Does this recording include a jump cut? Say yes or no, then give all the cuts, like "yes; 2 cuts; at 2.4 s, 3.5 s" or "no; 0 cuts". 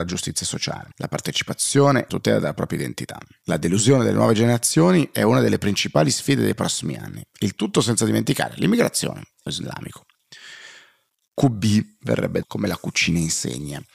yes; 4 cuts; at 0.9 s, 2.1 s, 9.5 s, 12.4 s